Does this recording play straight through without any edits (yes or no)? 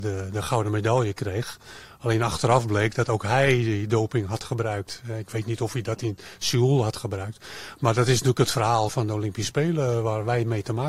no